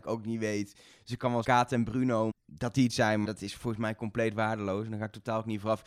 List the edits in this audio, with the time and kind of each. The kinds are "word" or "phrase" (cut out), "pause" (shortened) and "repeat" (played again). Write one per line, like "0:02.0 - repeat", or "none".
0:01.4 - word
0:02.3 - word
0:02.9 - word
0:03.2 - word